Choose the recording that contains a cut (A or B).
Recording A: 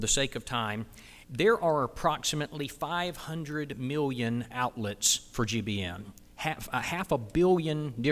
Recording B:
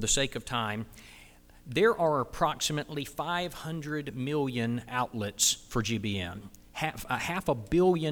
A